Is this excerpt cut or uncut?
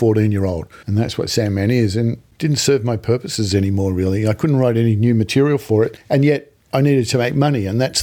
uncut